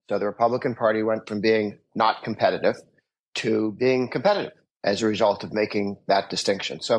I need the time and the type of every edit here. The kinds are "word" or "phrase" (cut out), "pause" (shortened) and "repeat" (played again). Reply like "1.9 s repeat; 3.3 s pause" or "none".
4.7 s word